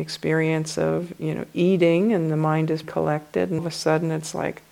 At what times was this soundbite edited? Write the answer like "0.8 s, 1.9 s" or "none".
2.8 s, 3.6 s